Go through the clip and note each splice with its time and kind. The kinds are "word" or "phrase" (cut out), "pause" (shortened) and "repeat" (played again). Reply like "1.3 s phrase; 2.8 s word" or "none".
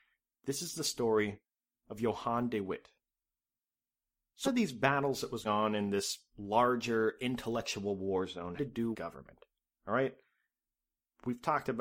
4.4 s word; 5.4 s word; 8.6 s word; 8.9 s word